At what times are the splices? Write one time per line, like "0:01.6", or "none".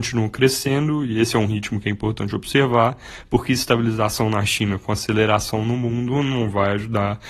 none